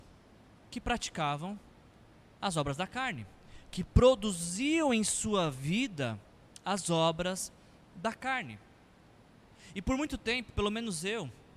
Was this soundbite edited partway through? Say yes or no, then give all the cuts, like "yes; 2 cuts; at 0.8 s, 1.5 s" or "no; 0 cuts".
no; 0 cuts